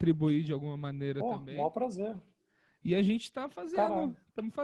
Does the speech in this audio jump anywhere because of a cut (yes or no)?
no